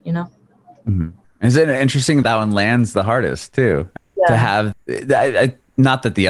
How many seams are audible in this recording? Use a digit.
3